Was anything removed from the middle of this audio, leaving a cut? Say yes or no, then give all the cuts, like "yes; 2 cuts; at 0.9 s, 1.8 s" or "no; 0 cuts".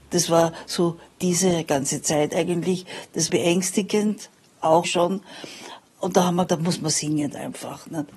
yes; 3 cuts; at 3.3 s, 4.8 s, 6.5 s